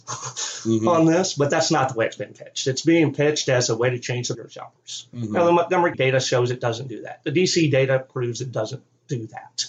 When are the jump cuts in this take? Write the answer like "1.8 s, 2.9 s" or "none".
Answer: 4.3 s, 5.9 s